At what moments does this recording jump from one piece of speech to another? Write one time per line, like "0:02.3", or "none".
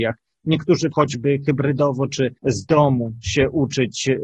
0:00.9
0:02.4